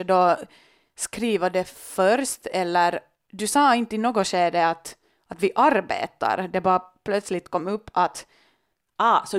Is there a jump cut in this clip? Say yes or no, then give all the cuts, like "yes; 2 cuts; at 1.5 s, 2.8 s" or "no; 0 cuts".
no; 0 cuts